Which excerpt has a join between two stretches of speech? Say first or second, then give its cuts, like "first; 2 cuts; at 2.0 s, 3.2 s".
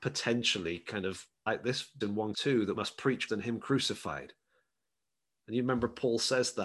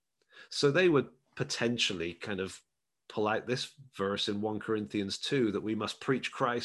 first; 5 cuts; at 1.5 s, 2.0 s, 2.3 s, 2.8 s, 3.3 s